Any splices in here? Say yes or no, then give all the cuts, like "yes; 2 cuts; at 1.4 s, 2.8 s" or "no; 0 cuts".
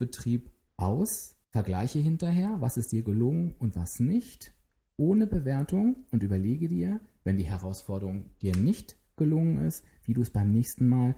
yes; 1 cut; at 1.4 s